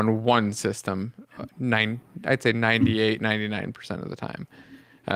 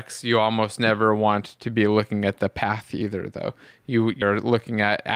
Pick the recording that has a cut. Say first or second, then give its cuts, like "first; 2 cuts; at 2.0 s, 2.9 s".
second; 1 cut; at 4.2 s